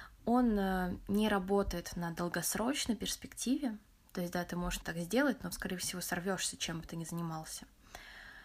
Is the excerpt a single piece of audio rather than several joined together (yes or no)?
no